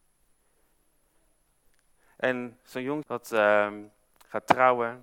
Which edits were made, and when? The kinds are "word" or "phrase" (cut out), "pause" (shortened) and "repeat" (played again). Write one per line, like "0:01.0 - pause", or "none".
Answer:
0:03.0 - word